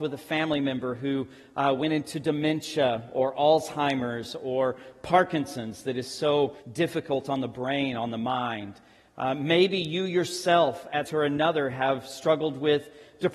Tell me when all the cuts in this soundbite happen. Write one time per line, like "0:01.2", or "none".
0:06.6
0:11.1